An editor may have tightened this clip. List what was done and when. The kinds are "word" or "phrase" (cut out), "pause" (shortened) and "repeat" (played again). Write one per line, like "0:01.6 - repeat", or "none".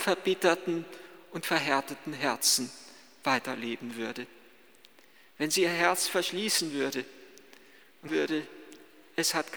0:08.1 - word

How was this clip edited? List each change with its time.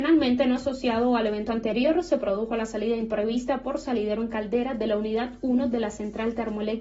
none

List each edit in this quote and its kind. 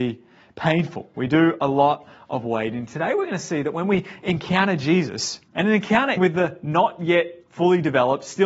0:05.5 - pause
0:06.2 - word

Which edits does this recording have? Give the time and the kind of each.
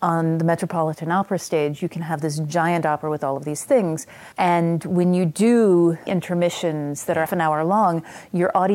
0:04.3 - pause
0:06.1 - word
0:07.3 - word

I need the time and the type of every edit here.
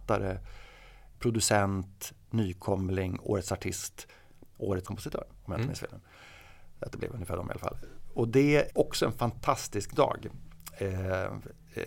0:01.1 - word
0:04.8 - phrase
0:06.9 - phrase
0:08.7 - word

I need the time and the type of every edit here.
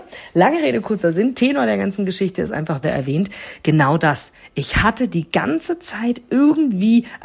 0:02.8 - phrase

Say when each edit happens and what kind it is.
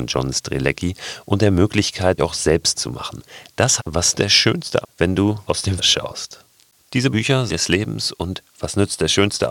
0:02.2 - word
0:02.7 - word
0:03.8 - word
0:04.1 - word
0:04.8 - word
0:05.5 - word
0:05.8 - word
0:07.1 - word
0:07.5 - word

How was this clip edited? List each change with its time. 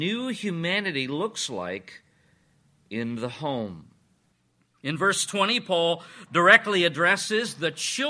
none

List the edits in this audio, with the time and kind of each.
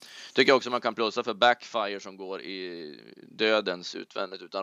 none

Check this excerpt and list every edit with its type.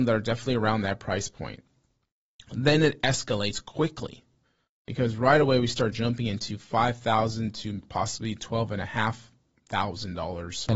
none

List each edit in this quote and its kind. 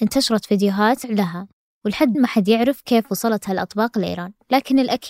0:01.0 - word
0:02.1 - word

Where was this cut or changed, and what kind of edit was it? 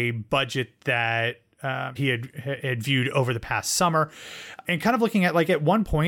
0:02.0 - word

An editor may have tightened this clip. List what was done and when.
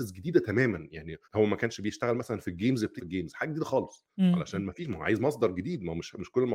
0:01.2 - pause
0:03.0 - word
0:04.1 - pause

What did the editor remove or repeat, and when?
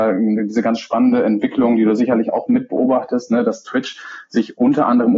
none

